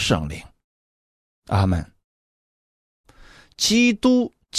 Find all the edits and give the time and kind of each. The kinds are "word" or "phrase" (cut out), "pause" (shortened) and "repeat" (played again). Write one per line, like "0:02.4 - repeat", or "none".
none